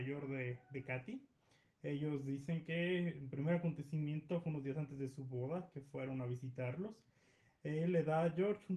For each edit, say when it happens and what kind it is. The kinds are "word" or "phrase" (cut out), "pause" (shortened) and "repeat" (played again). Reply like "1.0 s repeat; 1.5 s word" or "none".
none

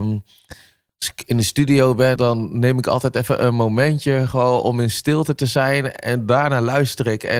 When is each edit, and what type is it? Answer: 2.2 s word

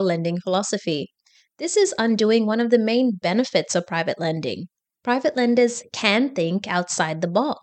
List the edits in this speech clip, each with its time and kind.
none

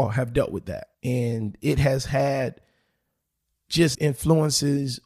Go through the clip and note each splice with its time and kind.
0.9 s pause; 3.9 s word

